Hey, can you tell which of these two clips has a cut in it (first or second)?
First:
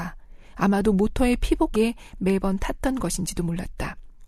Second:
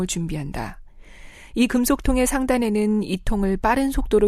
first